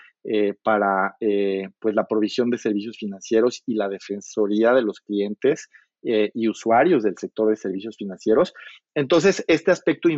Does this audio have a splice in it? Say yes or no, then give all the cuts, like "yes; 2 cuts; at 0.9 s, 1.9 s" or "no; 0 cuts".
no; 0 cuts